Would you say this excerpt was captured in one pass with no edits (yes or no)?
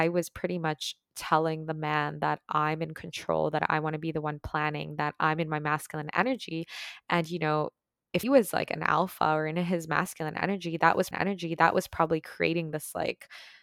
no